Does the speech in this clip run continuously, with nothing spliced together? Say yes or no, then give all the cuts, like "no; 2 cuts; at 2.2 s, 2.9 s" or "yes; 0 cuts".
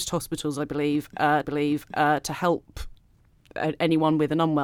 no; 1 cut; at 1.4 s